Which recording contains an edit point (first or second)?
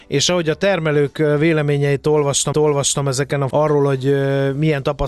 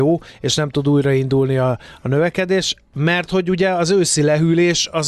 first